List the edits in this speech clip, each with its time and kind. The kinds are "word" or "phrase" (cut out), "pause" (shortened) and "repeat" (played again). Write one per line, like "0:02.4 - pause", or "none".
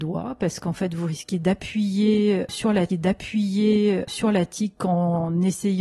0:02.9 - repeat